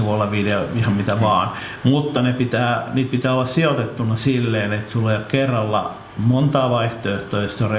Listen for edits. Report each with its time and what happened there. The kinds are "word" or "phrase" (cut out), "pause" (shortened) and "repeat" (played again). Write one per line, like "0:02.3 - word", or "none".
none